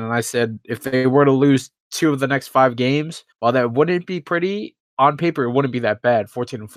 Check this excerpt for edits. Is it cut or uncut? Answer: cut